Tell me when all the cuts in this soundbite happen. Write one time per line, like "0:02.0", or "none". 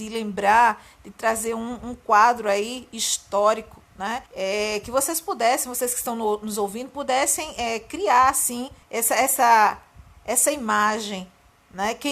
0:04.3
0:08.8